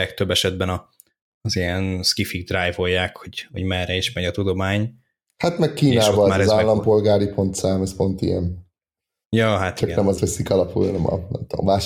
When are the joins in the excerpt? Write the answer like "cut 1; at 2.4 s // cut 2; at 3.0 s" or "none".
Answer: cut 1; at 10.2 s